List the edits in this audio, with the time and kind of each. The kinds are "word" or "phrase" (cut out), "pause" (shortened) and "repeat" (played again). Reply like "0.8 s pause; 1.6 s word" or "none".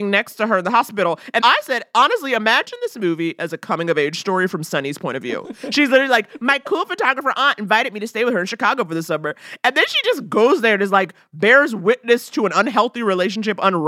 1.4 s word